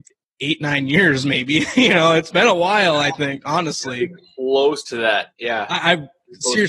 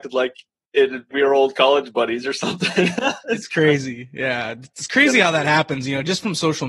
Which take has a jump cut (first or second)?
second